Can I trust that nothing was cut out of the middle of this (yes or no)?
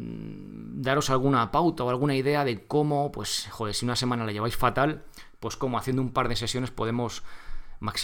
yes